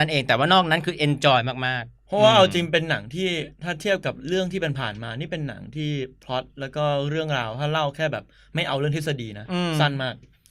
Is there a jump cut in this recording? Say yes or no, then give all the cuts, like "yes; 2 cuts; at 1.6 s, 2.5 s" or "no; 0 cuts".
no; 0 cuts